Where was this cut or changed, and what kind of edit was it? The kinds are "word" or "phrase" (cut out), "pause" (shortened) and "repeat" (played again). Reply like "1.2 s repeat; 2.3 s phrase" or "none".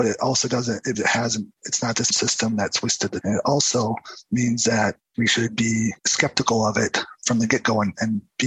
0.9 s word; 1.5 s pause; 2.1 s word; 3.2 s word; 5.0 s pause; 6.0 s pause